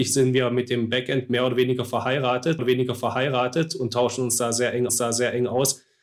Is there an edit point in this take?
yes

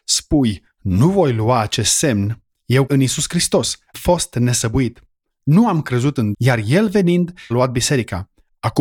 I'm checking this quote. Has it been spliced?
yes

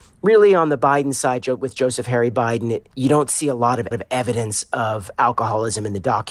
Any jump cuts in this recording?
yes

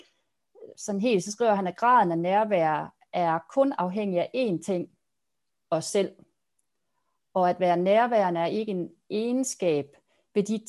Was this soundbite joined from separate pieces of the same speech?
no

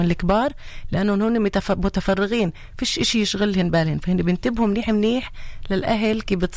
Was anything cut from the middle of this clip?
no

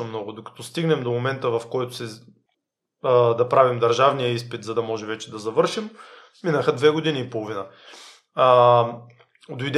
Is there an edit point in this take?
no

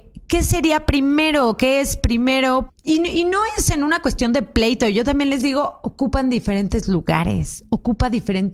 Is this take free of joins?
no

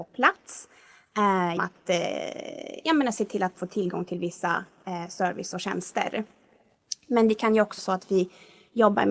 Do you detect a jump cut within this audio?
yes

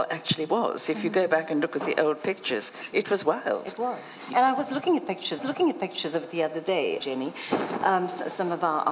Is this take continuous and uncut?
no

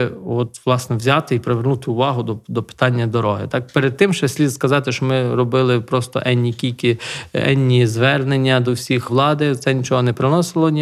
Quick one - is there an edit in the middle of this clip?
yes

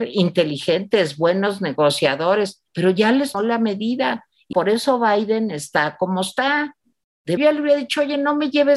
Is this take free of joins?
no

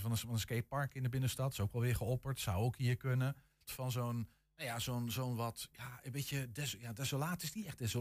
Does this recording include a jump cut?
yes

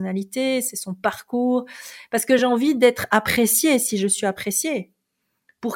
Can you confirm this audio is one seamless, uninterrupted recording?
yes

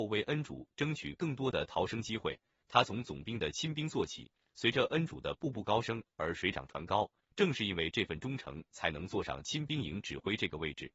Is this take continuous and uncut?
yes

